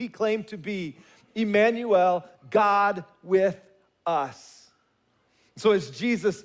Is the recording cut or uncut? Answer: uncut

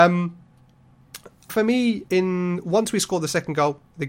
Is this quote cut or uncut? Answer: cut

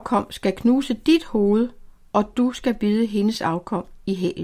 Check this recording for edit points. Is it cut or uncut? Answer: uncut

